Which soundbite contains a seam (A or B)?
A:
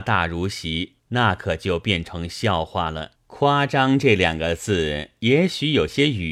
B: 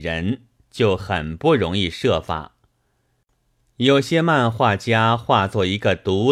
A